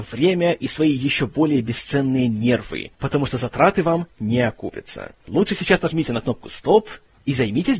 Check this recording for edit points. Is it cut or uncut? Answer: cut